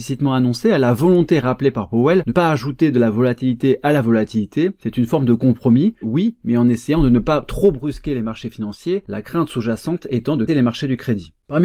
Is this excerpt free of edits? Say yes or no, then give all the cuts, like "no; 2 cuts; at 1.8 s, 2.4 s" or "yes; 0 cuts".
no; 3 cuts; at 2.3 s, 6.0 s, 10.5 s